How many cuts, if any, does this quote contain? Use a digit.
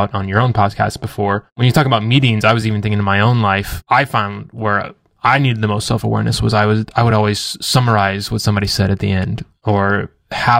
0